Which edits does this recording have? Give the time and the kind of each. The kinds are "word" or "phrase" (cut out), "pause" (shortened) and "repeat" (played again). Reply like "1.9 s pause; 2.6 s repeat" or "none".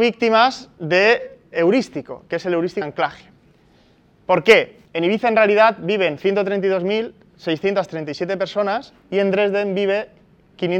1.5 s word; 2.8 s word; 4.9 s pause